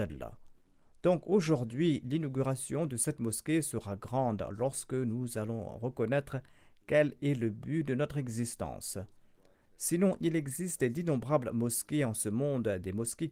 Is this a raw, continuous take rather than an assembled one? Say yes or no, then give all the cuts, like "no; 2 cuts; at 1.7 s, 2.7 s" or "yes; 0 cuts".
yes; 0 cuts